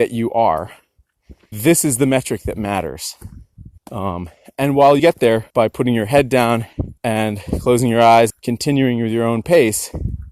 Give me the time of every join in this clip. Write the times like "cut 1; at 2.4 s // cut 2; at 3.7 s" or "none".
cut 1; at 1.5 s // cut 2; at 3.8 s // cut 3; at 5.0 s // cut 4; at 5.5 s // cut 5; at 7.0 s // cut 6; at 8.3 s